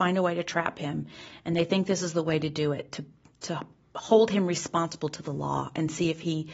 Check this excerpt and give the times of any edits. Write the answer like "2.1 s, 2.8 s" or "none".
none